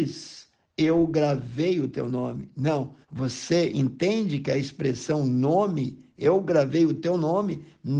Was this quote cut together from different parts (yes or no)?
yes